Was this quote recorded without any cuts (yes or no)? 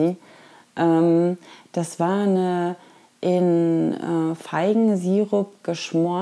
yes